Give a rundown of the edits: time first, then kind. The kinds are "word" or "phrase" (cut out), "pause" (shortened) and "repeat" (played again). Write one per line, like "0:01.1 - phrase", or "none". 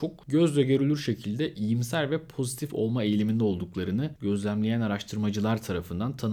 none